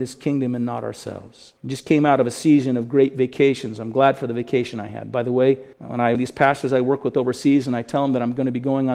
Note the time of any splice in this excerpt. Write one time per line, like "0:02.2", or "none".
0:01.6
0:05.7
0:06.1

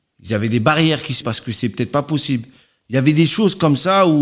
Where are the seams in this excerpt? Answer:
0:01.2

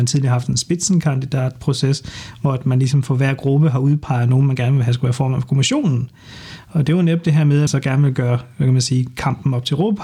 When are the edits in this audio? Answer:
0:07.7

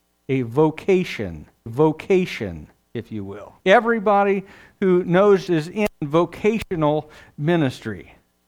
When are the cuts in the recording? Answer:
0:01.7
0:03.6
0:05.5

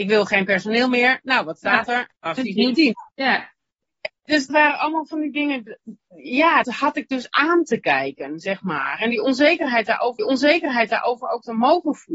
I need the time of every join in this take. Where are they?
0:02.2
0:03.1
0:04.5
0:06.6
0:10.2

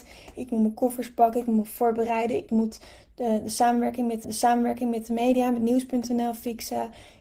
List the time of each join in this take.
0:04.2

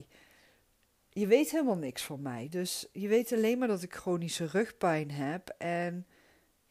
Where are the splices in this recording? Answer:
none

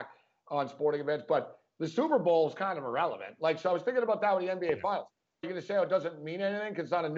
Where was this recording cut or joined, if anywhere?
0:05.4

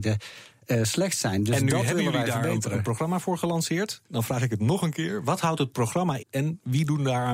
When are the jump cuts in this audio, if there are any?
0:04.0
0:06.2

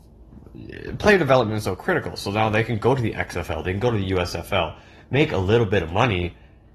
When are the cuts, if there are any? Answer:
none

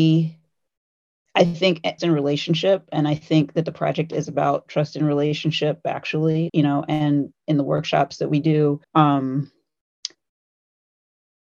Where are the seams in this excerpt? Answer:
0:02.0
0:06.5
0:08.8

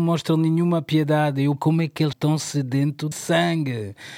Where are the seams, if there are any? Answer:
0:01.6
0:02.1
0:03.1

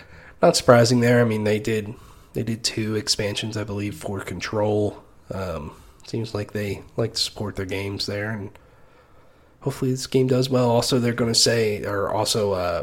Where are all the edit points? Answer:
none

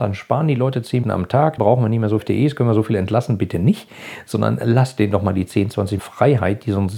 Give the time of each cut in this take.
0:01.0
0:01.6
0:02.2
0:06.0

